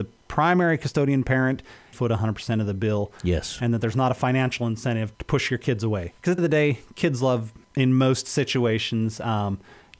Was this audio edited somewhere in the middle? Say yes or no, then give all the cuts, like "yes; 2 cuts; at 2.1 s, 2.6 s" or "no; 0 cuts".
yes; 3 cuts; at 1.9 s, 5.1 s, 6.4 s